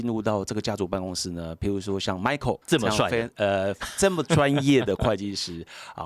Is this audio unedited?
no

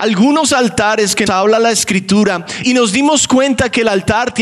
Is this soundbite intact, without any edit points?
no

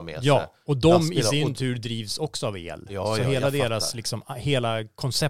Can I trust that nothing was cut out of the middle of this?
yes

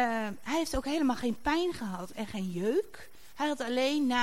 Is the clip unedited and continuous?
yes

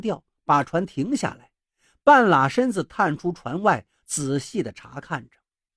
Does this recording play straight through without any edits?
yes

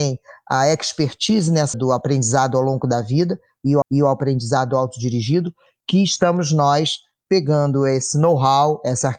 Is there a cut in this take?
yes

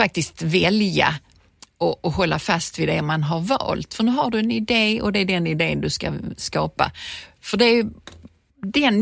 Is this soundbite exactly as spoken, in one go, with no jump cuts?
yes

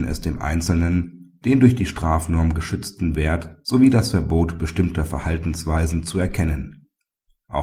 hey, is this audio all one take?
yes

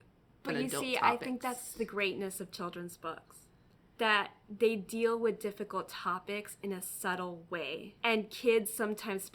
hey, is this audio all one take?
yes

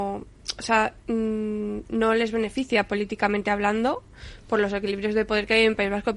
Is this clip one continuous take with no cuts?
no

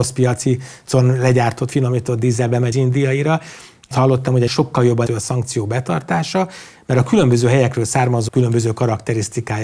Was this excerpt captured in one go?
no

